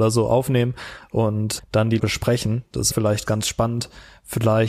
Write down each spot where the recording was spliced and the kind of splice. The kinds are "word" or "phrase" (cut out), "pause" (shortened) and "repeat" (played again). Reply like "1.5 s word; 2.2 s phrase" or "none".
1.6 s word; 2.0 s word; 2.9 s word; 3.3 s word